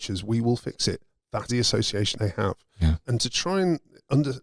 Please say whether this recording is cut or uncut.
cut